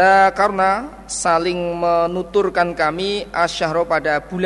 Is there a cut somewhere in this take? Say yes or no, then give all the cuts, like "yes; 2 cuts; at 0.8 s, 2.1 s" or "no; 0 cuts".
no; 0 cuts